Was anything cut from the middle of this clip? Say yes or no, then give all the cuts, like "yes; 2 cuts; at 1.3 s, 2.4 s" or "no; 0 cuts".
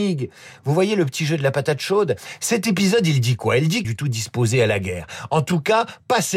yes; 1 cut; at 3.8 s